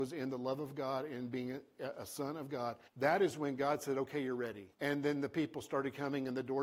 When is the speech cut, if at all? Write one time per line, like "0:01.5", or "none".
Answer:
0:02.9
0:04.7